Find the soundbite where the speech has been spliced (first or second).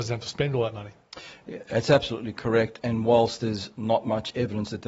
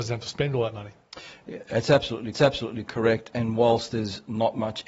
second